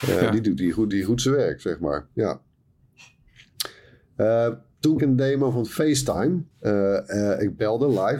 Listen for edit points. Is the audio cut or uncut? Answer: cut